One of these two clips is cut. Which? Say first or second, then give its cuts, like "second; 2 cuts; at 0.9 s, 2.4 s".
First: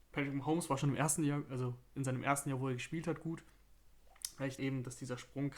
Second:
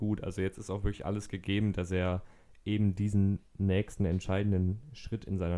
first; 1 cut; at 4.6 s